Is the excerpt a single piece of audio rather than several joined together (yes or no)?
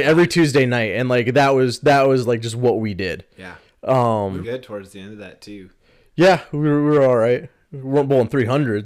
no